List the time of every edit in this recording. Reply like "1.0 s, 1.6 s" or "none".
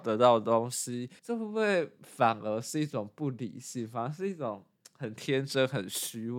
1.2 s

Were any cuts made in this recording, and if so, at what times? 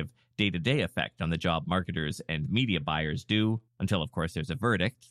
3.7 s

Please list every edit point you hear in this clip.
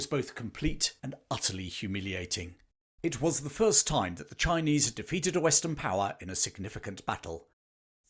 1.0 s

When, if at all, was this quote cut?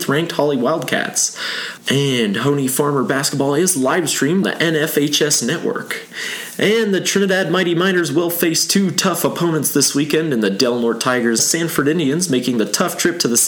4.4 s, 11.4 s

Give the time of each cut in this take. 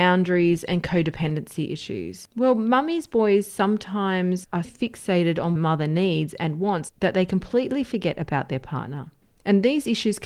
4.6 s, 5.6 s

